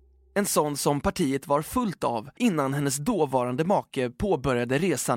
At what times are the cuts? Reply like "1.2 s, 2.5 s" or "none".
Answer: none